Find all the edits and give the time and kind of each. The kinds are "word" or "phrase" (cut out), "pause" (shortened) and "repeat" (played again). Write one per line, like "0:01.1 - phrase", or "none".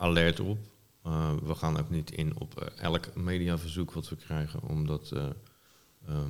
none